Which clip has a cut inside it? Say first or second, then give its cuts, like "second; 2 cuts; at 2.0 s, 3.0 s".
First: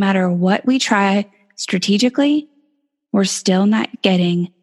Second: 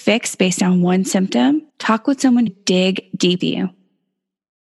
second; 3 cuts; at 1.7 s, 2.5 s, 3.4 s